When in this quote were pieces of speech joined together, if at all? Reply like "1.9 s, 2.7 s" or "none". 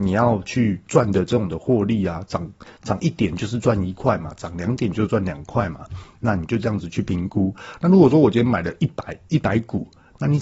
9.2 s